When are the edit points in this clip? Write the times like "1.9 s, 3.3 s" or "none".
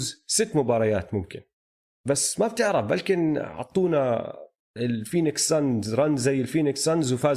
none